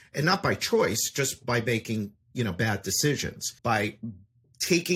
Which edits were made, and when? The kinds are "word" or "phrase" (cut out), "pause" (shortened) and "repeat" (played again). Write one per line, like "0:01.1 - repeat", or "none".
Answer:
0:03.6 - pause